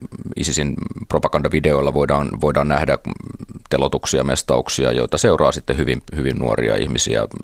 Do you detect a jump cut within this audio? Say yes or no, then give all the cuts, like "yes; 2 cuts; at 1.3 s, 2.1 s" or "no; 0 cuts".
no; 0 cuts